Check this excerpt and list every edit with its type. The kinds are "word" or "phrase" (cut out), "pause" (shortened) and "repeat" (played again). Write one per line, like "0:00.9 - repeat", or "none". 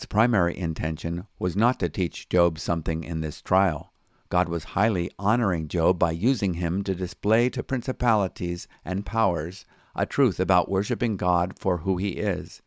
none